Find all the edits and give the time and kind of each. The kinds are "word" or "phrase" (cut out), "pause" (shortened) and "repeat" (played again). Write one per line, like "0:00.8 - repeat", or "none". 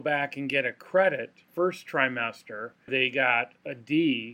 0:01.5 - phrase
0:02.9 - word